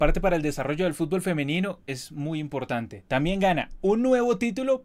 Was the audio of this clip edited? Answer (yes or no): no